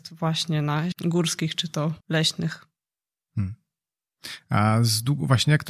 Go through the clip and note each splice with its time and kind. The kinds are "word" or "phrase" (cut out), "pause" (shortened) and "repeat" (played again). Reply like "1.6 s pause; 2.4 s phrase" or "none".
0.9 s word; 2.0 s pause